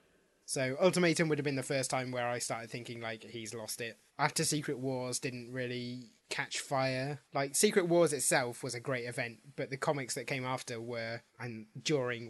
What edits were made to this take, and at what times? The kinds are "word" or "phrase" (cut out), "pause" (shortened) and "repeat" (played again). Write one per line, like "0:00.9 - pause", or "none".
0:04.1 - pause
0:06.2 - pause
0:07.2 - pause
0:11.3 - pause